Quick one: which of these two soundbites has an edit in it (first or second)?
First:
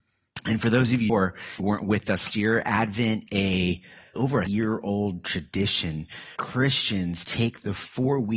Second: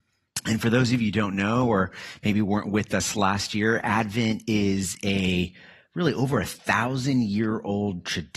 first